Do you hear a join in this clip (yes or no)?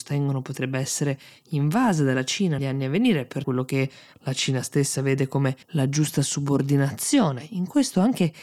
yes